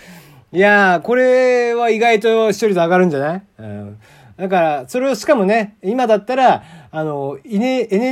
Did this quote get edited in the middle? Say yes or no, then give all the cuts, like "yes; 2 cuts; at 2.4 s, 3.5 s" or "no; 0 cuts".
no; 0 cuts